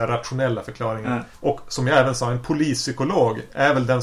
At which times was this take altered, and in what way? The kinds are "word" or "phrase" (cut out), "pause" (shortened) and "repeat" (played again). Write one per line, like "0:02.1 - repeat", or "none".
none